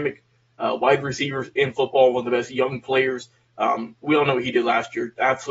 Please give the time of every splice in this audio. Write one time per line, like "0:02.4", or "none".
none